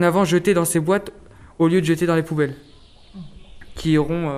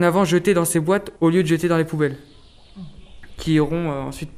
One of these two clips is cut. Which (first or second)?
second